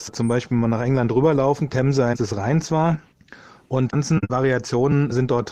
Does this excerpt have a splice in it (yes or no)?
yes